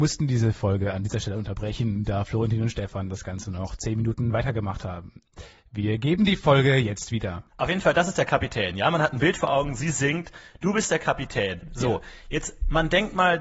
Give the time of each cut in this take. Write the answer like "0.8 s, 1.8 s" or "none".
7.5 s